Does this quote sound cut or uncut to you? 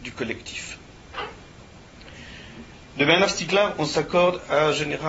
uncut